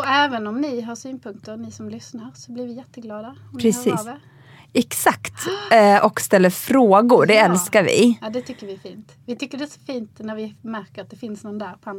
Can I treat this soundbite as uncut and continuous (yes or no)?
yes